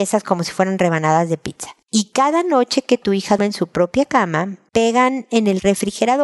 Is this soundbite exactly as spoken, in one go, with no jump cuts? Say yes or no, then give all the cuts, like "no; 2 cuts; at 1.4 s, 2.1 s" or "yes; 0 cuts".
no; 1 cut; at 3.4 s